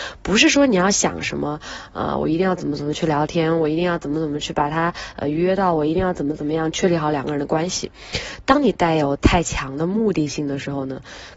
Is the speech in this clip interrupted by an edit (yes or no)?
no